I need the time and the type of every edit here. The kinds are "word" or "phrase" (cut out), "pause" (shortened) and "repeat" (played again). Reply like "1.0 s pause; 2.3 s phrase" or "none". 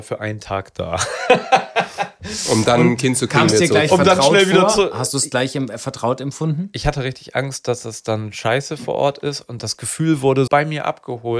10.5 s word